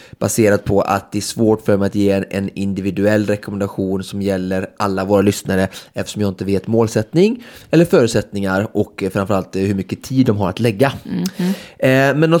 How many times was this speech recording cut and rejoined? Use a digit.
0